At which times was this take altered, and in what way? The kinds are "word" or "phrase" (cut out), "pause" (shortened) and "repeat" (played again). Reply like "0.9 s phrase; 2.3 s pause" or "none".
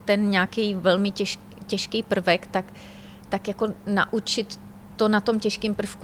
none